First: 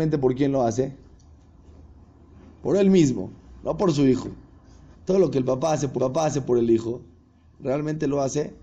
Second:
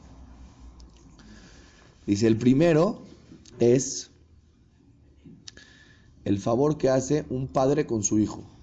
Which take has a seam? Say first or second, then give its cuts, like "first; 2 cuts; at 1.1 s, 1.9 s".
first; 2 cuts; at 4.9 s, 6.0 s